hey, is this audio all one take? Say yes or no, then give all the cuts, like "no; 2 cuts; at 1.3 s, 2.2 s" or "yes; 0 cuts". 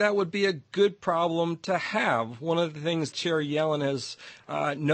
no; 1 cut; at 3.1 s